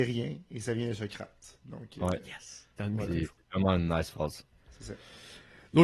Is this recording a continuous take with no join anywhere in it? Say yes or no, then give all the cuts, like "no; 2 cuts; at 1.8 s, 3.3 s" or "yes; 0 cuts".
yes; 0 cuts